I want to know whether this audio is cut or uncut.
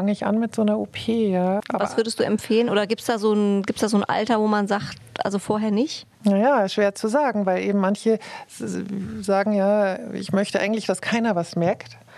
cut